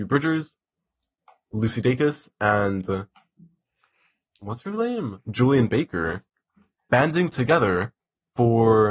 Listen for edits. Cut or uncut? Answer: uncut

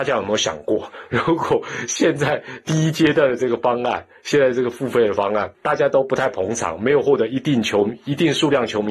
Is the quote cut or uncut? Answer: cut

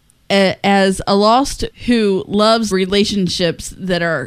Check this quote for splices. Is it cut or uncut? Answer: cut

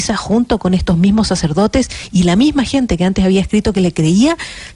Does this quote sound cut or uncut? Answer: uncut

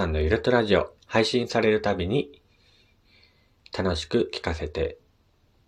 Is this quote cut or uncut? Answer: cut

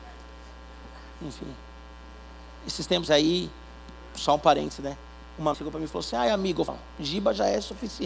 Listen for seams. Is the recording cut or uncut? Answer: cut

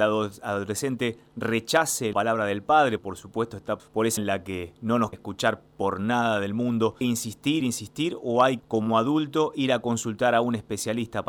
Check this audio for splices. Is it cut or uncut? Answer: cut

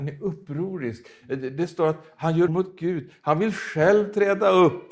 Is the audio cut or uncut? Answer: cut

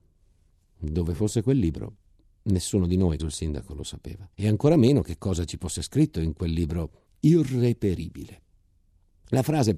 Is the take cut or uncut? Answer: cut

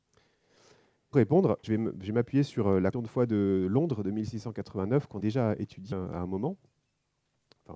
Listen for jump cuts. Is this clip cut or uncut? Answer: cut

